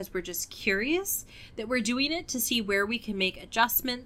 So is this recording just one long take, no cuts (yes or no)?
yes